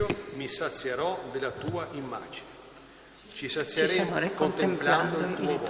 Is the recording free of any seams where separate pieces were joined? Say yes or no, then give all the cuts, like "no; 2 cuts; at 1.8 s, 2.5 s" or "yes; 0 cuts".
no; 1 cut; at 4.1 s